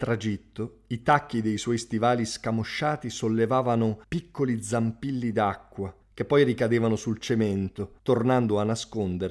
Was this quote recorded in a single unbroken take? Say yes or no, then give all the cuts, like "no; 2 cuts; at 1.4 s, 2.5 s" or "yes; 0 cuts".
no; 3 cuts; at 4.0 s, 6.0 s, 8.0 s